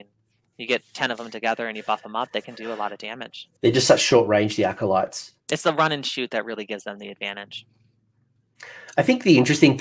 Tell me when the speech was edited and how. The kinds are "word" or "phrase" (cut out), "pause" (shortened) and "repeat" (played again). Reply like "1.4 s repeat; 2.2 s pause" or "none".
3.6 s pause; 5.4 s pause

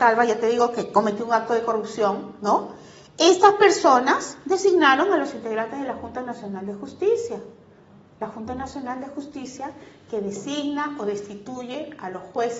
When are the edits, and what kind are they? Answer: none

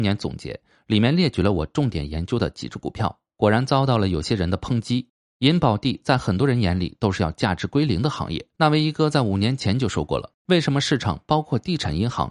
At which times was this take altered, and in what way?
8.5 s pause; 10.4 s pause

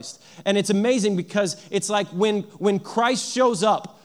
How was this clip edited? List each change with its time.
none

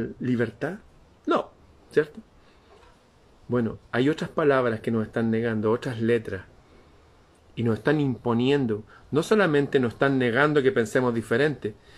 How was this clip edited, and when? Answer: none

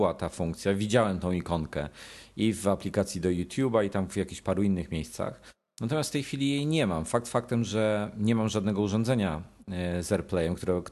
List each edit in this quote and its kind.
none

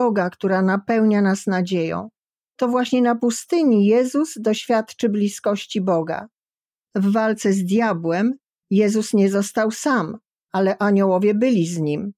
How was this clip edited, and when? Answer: none

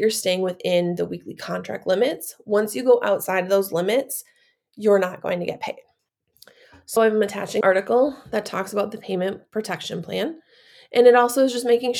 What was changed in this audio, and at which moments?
7.0 s word; 7.6 s word

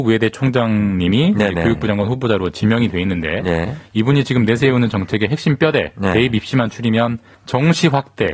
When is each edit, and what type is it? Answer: 7.3 s pause

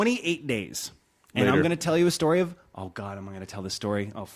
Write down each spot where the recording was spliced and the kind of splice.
none

